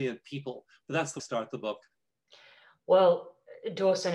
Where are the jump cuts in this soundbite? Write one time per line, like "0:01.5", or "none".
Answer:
0:01.2